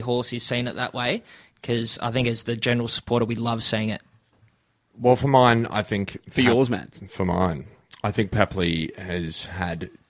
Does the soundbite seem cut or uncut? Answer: uncut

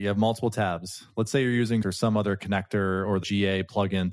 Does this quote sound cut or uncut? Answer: cut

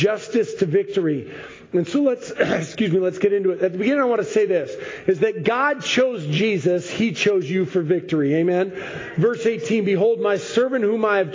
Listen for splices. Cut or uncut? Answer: uncut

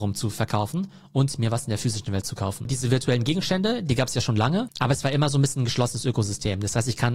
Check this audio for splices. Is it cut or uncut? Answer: uncut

